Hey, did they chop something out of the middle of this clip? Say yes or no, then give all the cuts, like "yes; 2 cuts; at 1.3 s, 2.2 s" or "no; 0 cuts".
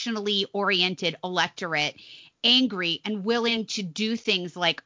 no; 0 cuts